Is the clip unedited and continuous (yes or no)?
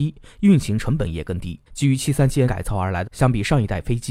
no